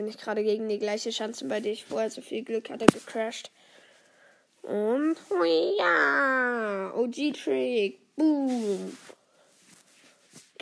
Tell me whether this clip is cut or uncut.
uncut